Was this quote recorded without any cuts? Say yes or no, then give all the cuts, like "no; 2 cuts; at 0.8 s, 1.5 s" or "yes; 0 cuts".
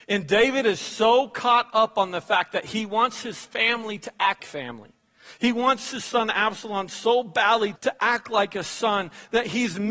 no; 2 cuts; at 4.4 s, 7.8 s